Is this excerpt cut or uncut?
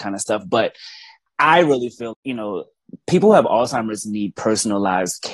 cut